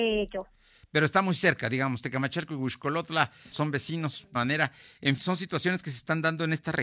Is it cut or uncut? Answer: cut